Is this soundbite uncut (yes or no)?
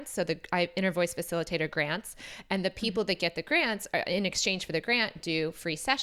yes